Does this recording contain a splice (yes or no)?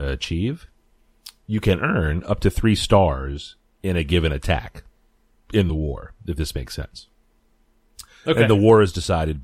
no